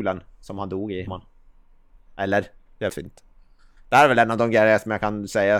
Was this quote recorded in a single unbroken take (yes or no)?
no